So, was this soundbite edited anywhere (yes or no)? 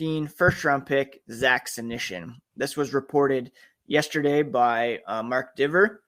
no